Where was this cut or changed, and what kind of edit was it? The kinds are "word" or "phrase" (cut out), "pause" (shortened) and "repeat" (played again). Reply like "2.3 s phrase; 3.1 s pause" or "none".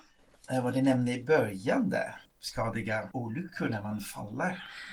2.3 s word

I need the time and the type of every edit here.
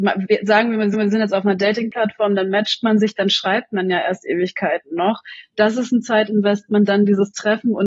0.9 s repeat

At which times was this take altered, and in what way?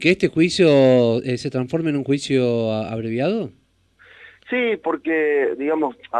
none

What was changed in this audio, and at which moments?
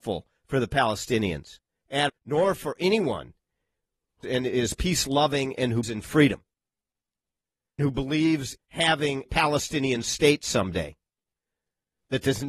2.1 s word; 4.2 s word; 5.8 s word; 7.8 s word; 8.6 s word; 9.3 s word

